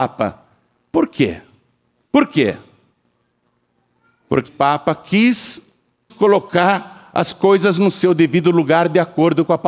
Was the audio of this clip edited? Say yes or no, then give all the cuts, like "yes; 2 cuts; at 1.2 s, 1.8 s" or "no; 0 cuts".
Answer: yes; 2 cuts; at 4.5 s, 6.1 s